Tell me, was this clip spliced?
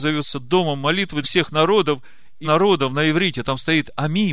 yes; 2 cuts; at 1.2 s, 2.4 s

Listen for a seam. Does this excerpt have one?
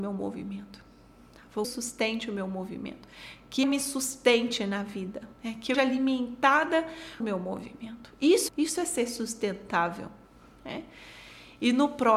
yes; 6 cuts; at 1.6 s, 3.6 s, 5.3 s, 5.7 s, 7.2 s, 8.5 s

